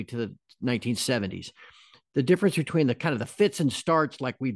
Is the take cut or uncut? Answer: uncut